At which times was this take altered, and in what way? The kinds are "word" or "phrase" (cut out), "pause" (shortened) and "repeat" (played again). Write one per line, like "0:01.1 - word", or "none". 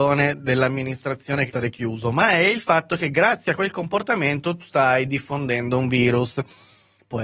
0:01.5 - phrase
0:04.6 - word